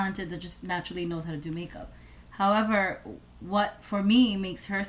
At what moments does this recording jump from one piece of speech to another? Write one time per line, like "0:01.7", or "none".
none